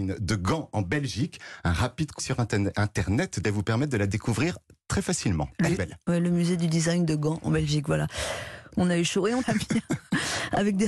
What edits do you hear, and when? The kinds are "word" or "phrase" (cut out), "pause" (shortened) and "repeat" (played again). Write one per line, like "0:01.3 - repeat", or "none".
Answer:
0:02.2 - word
0:03.4 - word
0:05.8 - word
0:09.4 - word